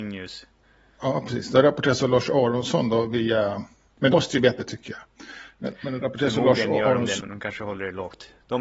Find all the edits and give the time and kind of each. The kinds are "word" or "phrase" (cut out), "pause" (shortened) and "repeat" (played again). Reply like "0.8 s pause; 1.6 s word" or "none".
4.1 s word; 4.6 s word; 7.2 s word